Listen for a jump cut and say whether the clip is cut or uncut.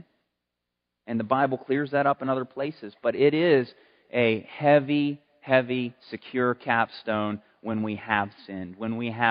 cut